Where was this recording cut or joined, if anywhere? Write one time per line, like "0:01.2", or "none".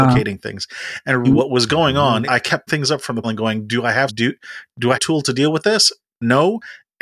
0:01.2
0:02.2
0:02.7
0:03.2
0:04.1
0:04.9